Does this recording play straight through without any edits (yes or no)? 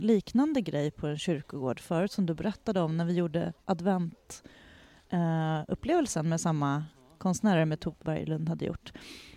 no